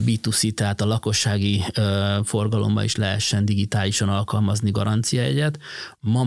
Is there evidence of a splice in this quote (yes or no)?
no